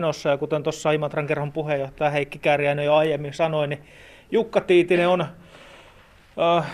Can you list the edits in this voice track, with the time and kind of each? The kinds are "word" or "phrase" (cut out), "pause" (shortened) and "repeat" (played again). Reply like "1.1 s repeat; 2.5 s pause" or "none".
none